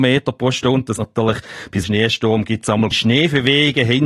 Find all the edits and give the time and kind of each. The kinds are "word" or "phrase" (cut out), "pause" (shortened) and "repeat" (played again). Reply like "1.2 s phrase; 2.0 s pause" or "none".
1.0 s word; 1.8 s word; 2.9 s word